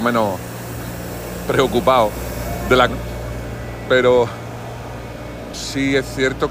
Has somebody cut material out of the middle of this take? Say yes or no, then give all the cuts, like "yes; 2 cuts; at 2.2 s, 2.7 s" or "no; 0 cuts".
yes; 2 cuts; at 2.9 s, 5.5 s